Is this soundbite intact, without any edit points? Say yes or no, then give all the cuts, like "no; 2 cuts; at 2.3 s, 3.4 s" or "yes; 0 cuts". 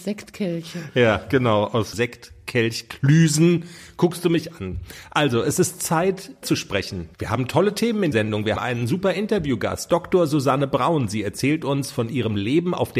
no; 5 cuts; at 1.9 s, 6.4 s, 7.1 s, 8.1 s, 8.6 s